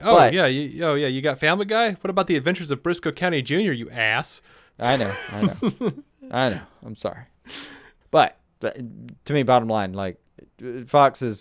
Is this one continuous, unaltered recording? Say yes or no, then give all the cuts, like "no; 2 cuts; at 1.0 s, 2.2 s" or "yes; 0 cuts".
yes; 0 cuts